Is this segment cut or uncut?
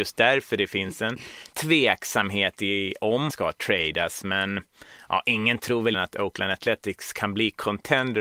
cut